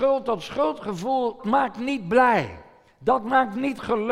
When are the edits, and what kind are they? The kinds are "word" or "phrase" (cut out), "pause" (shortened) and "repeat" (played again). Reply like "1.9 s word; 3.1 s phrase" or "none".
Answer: 1.4 s word